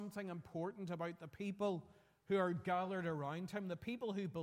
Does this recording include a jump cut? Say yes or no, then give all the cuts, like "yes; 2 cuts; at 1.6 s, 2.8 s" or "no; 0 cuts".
no; 0 cuts